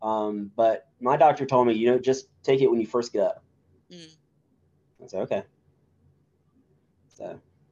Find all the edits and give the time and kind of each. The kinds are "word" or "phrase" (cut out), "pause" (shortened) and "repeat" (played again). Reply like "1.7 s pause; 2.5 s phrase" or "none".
none